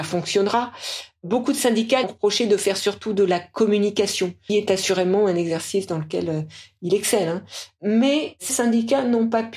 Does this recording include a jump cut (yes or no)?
yes